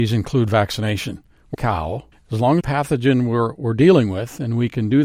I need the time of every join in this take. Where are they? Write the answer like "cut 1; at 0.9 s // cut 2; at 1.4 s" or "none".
cut 1; at 1.5 s // cut 2; at 2.1 s // cut 3; at 2.6 s